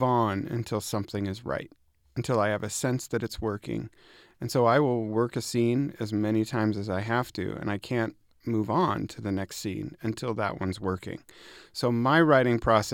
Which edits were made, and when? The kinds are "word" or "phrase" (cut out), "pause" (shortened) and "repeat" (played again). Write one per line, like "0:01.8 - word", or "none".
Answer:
none